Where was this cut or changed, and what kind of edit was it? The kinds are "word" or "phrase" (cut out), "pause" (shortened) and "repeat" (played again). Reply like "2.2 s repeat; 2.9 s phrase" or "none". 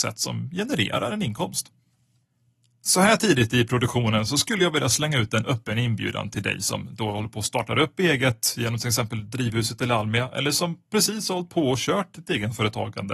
none